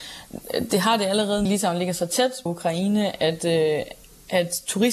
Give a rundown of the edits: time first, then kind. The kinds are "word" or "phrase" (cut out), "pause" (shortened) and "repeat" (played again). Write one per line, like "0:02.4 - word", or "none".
0:01.5 - phrase
0:02.5 - word